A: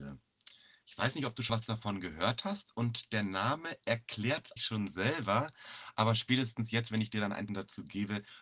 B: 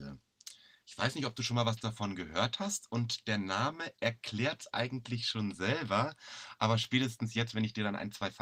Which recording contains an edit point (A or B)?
A